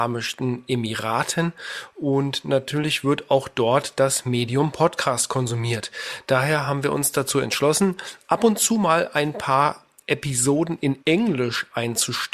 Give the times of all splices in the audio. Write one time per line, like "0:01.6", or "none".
0:11.0